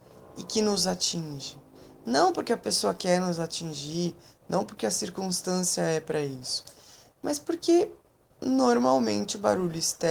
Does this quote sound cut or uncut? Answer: uncut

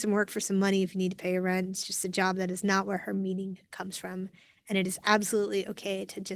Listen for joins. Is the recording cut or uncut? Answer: uncut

